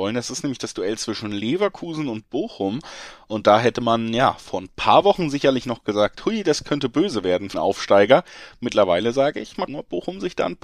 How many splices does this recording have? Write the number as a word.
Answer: two